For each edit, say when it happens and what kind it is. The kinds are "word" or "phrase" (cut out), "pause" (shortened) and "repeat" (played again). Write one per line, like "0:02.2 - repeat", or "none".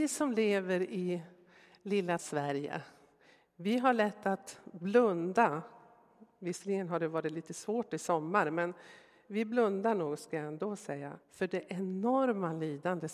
0:02.2 - word
0:11.2 - pause